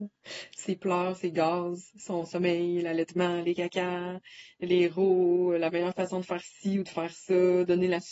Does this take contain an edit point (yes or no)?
no